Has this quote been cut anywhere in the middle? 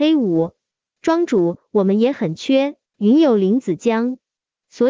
yes; 1 cut; at 2.9 s

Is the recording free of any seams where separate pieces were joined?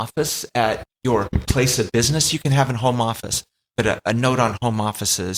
yes; 0 cuts

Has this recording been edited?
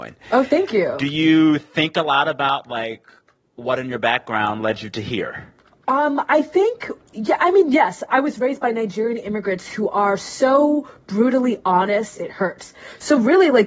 no; 0 cuts

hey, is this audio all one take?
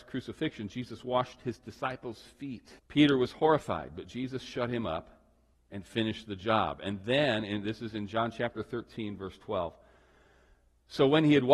no; 2 cuts; at 2.8 s, 5.5 s

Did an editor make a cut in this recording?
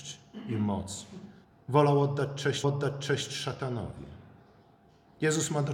yes; 2 cuts; at 1.4 s, 2.6 s

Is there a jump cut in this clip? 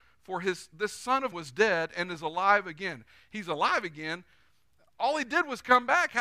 yes; 1 cut; at 1.3 s

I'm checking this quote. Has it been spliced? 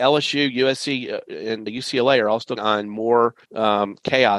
yes; 3 cuts; at 1.7 s, 2.6 s, 3.4 s

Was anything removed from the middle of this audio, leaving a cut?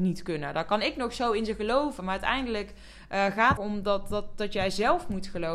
yes; 1 cut; at 3.6 s

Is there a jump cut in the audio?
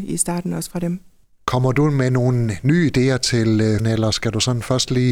yes; 1 cut; at 3.8 s

